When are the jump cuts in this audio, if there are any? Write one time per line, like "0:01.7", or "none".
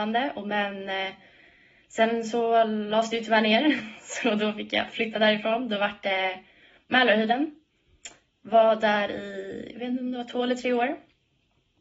none